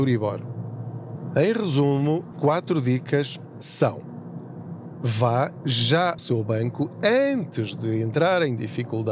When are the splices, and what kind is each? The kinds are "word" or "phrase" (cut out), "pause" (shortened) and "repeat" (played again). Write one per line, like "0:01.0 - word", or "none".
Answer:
0:02.3 - word
0:04.9 - word
0:06.2 - word